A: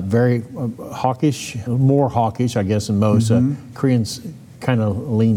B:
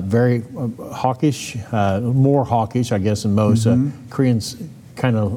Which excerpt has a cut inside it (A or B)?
A